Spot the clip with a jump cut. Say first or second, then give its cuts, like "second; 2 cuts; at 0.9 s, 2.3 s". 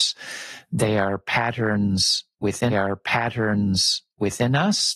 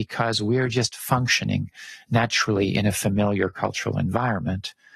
first; 1 cut; at 2.7 s